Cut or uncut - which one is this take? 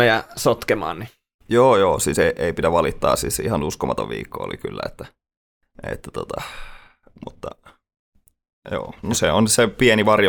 uncut